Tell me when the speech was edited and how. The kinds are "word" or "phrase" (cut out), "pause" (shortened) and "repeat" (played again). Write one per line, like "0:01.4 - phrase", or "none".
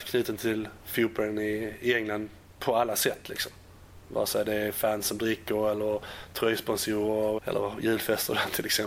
0:07.4 - word